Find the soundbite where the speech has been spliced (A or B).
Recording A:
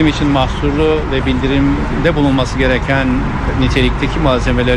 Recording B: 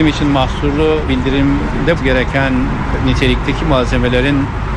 B